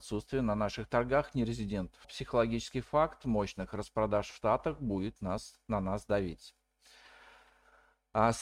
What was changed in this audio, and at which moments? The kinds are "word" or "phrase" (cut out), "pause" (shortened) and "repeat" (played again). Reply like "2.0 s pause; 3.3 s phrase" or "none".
2.0 s word

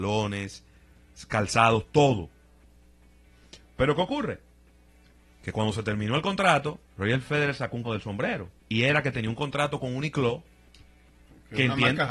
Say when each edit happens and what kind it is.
6.9 s pause; 7.8 s word; 8.6 s pause

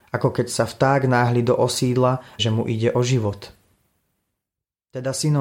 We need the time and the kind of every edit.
2.4 s phrase

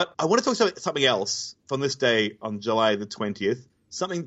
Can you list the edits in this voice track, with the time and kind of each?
none

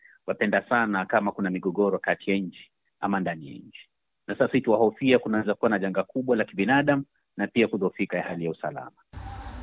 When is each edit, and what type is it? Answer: none

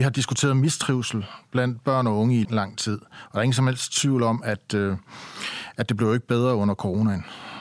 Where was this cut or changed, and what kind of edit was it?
2.4 s word

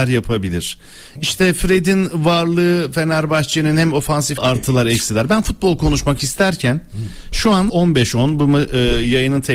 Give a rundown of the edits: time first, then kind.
4.4 s phrase; 7.7 s word

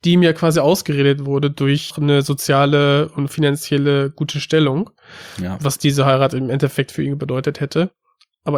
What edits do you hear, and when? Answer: 1.9 s word

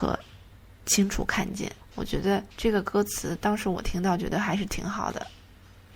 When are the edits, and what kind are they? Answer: 1.8 s pause; 2.5 s pause

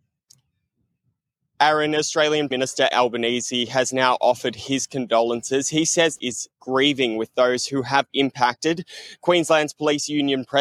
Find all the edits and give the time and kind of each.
2.5 s word; 2.9 s word; 4.2 s word; 6.2 s phrase; 8.1 s word

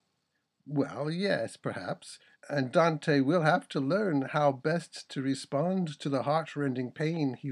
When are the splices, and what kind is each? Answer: 2.3 s pause

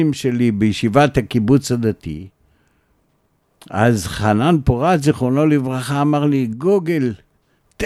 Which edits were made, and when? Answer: none

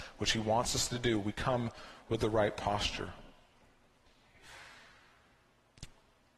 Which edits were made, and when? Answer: none

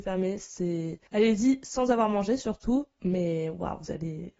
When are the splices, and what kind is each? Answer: 1.1 s pause

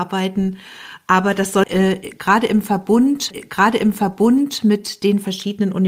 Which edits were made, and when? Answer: 1.6 s word; 3.3 s repeat

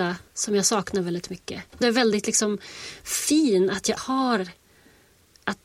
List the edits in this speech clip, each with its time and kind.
1.8 s phrase; 4.0 s word

